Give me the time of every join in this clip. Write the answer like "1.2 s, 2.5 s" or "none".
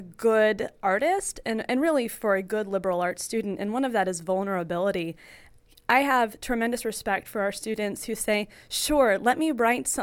none